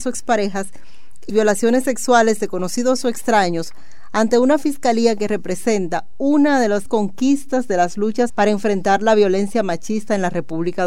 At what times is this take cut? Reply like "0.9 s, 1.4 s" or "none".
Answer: 1.3 s, 6.9 s, 8.3 s